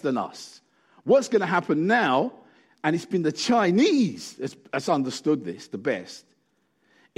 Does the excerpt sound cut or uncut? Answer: uncut